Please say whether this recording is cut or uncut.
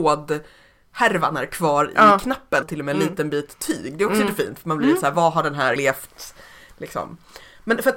cut